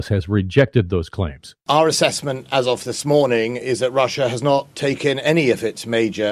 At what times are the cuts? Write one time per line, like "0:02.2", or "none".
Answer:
0:01.6